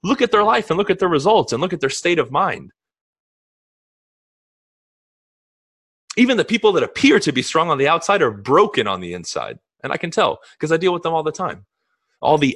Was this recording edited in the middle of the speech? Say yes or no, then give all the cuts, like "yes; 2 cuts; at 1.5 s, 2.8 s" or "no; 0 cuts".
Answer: no; 0 cuts